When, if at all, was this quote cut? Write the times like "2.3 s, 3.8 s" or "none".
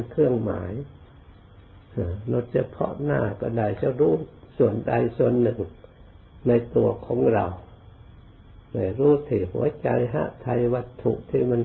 none